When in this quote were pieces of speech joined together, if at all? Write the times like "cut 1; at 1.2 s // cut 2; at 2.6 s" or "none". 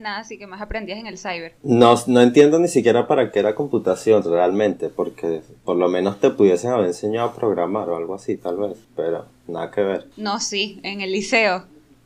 cut 1; at 1.6 s // cut 2; at 8.8 s // cut 3; at 10.1 s